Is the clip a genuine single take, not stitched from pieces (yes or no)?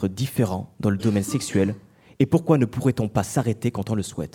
yes